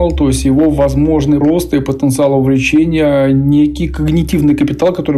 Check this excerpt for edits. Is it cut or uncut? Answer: cut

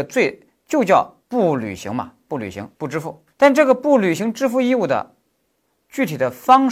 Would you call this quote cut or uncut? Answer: cut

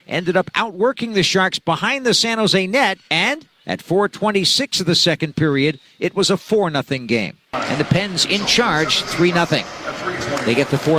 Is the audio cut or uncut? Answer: cut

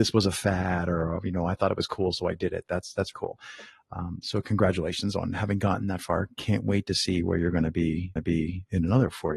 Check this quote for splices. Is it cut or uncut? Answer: cut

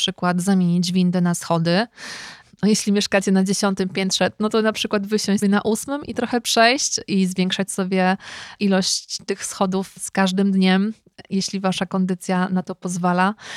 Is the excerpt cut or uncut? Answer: cut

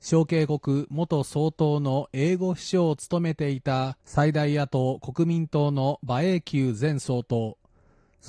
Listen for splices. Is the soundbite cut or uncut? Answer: cut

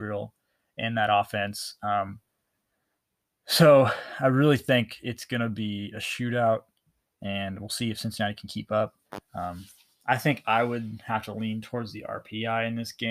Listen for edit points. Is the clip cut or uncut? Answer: uncut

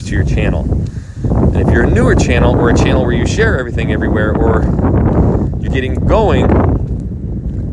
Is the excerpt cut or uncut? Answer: cut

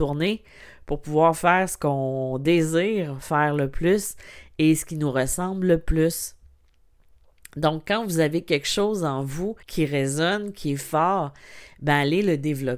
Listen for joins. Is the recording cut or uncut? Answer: cut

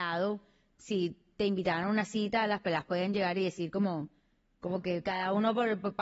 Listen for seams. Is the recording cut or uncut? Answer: uncut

